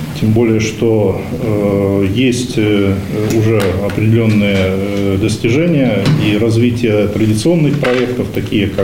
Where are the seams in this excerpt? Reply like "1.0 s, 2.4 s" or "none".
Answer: none